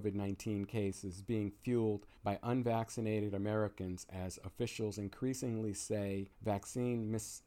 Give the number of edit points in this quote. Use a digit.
2